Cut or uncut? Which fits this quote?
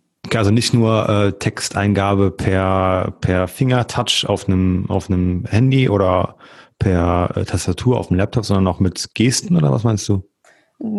uncut